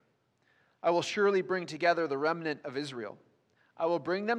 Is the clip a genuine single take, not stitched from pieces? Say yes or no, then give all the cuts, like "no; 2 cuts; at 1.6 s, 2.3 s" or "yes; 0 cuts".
yes; 0 cuts